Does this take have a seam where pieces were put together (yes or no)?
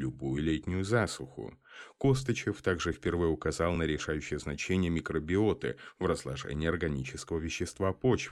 no